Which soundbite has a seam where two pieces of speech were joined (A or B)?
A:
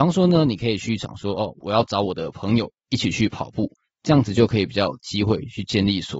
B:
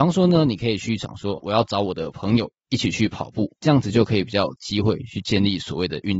B